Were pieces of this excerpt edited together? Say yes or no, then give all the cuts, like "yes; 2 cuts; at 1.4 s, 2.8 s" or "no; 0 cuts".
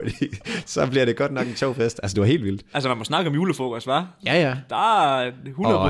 no; 0 cuts